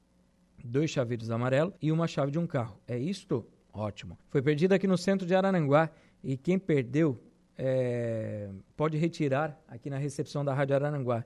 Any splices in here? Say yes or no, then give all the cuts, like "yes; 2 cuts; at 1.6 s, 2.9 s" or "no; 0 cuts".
yes; 3 cuts; at 1.8 s, 4.2 s, 8.7 s